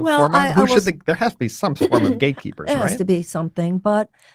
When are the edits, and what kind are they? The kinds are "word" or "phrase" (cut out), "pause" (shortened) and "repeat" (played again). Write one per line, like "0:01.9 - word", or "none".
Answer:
none